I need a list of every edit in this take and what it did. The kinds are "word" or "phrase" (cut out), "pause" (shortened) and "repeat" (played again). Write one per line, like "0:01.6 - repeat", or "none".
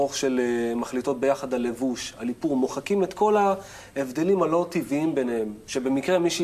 none